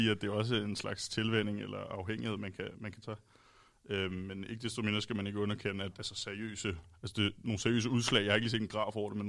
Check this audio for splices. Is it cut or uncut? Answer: cut